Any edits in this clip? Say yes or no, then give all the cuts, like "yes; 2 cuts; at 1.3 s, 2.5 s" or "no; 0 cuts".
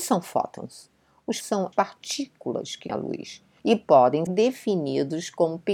yes; 4 cuts; at 1.4 s, 1.7 s, 2.9 s, 4.3 s